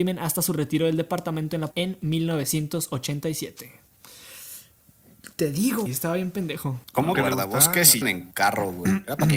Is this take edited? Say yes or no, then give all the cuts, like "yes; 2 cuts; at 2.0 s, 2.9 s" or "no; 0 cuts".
yes; 5 cuts; at 1.7 s, 5.9 s, 6.8 s, 7.1 s, 8.0 s